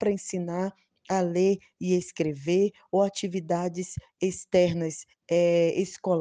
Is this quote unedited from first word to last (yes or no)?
yes